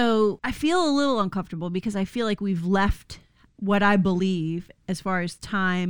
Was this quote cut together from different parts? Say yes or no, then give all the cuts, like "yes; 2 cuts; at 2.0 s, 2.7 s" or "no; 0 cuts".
no; 0 cuts